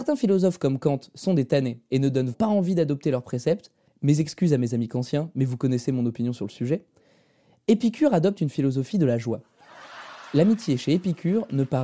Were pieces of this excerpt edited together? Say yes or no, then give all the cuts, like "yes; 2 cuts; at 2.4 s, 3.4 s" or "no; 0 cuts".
yes; 1 cut; at 2.3 s